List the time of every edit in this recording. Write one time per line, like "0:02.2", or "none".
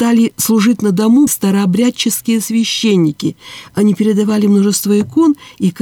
0:01.3